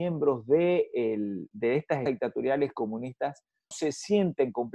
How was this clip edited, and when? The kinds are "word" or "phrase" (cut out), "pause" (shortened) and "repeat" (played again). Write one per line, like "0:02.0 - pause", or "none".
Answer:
0:01.5 - word
0:02.1 - word
0:03.7 - word